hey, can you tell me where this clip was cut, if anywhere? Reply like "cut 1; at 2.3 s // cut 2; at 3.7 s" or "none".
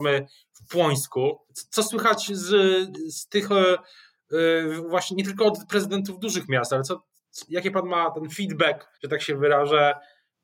cut 1; at 1.5 s // cut 2; at 8.9 s